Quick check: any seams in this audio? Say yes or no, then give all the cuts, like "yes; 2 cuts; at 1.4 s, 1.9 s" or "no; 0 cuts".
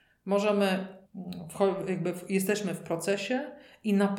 yes; 1 cut; at 1.1 s